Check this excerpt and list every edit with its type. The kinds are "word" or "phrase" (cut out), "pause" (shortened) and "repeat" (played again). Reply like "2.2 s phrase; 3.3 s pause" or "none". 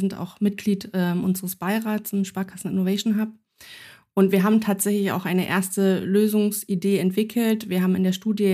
none